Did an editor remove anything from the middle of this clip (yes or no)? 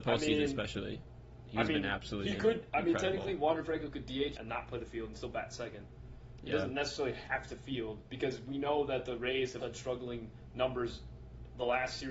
yes